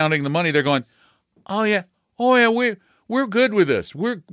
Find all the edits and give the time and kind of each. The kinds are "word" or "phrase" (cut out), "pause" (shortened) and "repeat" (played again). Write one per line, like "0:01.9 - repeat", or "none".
none